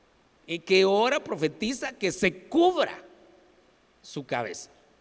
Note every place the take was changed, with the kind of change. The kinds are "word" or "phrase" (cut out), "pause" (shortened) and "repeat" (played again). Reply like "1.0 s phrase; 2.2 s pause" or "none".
none